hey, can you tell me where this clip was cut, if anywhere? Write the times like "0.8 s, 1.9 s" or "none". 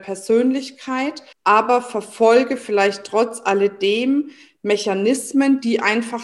1.3 s